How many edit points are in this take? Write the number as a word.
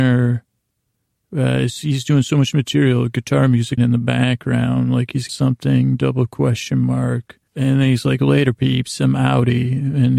three